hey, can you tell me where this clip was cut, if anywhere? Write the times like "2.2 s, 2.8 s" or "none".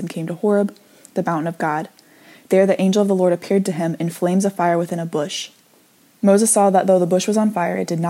none